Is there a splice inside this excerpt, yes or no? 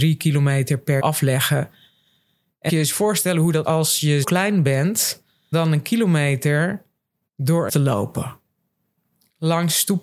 yes